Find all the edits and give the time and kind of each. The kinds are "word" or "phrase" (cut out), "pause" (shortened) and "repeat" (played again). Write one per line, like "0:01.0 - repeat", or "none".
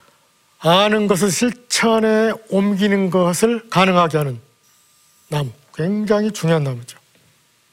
none